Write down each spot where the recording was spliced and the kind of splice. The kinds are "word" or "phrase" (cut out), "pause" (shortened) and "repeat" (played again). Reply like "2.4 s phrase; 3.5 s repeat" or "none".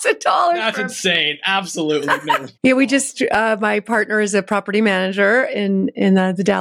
2.6 s phrase